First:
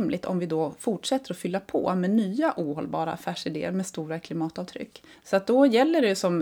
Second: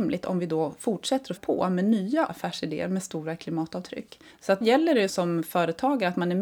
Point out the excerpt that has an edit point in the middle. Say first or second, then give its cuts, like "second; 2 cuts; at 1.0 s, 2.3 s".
second; 4 cuts; at 1.4 s, 2.3 s, 4.6 s, 5.1 s